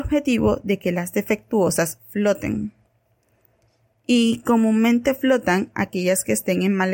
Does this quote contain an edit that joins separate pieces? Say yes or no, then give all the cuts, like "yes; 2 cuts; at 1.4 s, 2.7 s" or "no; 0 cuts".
no; 0 cuts